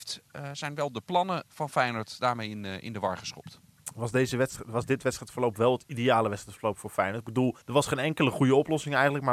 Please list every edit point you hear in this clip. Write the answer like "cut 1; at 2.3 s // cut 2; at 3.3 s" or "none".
cut 1; at 7.6 s